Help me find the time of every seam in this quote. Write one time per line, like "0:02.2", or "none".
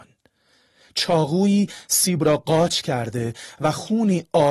none

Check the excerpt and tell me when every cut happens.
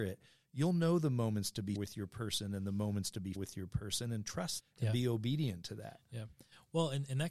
0:01.8
0:03.4
0:04.6

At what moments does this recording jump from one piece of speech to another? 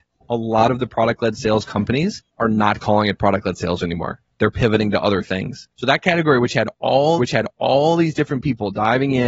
0:02.3
0:05.7
0:07.2

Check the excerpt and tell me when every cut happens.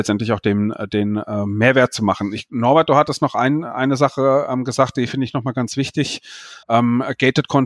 0:06.6

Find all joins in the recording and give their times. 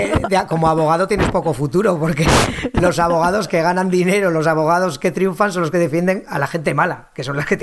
none

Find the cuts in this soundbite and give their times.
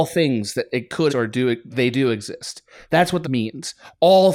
0:01.1
0:01.7
0:03.2

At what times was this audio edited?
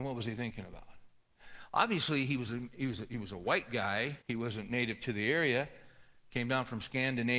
0:04.2

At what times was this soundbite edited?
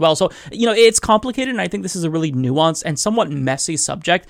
none

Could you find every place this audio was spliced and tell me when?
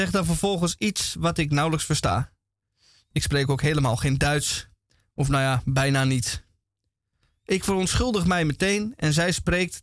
none

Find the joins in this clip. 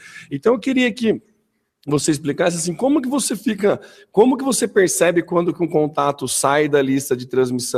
none

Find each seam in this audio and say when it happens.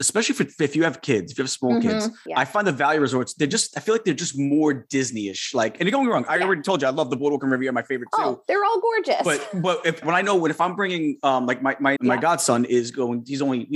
0:10.0
0:12.0

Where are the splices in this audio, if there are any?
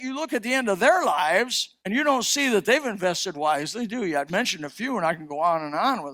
0:01.8
0:03.3
0:04.3

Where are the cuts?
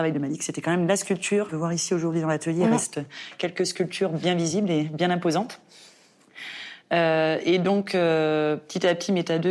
0:01.5

